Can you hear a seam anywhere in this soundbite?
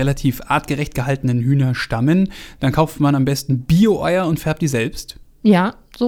no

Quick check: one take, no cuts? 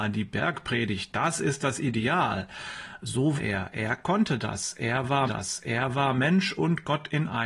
no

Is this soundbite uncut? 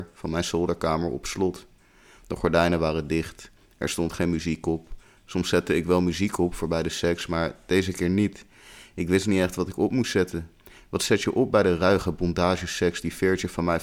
yes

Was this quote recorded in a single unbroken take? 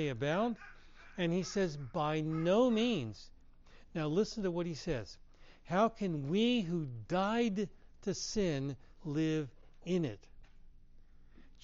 no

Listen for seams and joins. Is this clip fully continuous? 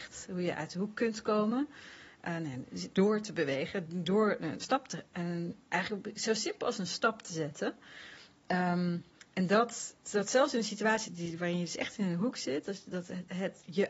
no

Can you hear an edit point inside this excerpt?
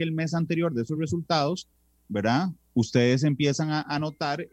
no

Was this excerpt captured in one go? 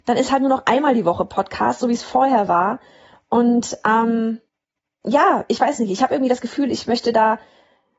yes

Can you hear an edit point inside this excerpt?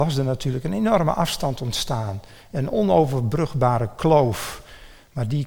no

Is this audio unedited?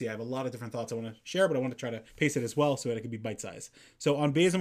no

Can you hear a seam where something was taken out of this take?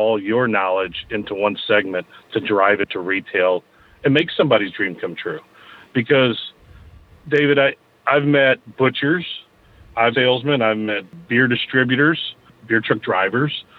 yes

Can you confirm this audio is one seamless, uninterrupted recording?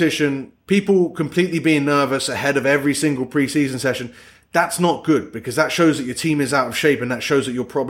yes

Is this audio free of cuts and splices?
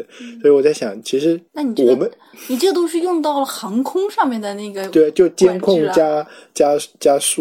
no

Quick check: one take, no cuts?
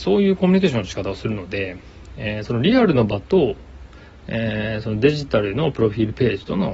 yes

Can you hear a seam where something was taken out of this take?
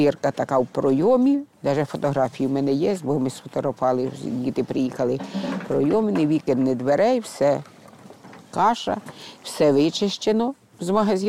yes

